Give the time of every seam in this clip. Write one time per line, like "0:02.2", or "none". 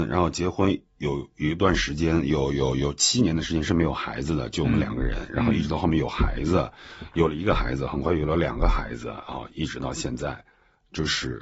none